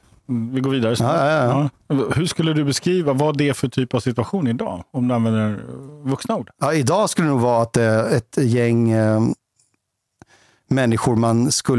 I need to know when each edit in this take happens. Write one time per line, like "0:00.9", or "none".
none